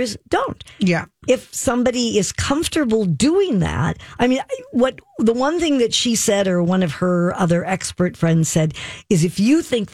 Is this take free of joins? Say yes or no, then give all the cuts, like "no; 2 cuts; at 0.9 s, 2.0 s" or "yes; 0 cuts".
yes; 0 cuts